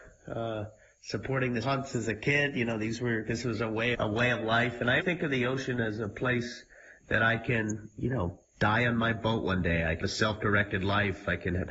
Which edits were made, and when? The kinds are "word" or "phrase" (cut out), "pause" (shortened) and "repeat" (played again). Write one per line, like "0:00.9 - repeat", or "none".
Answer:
0:01.6 - word
0:03.9 - word
0:05.0 - word
0:10.0 - word